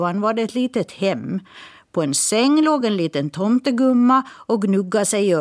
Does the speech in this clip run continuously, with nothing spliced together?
yes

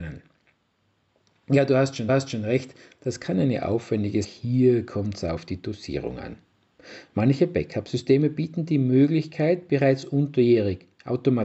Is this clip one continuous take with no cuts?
no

